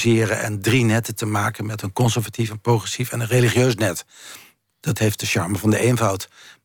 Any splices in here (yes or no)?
no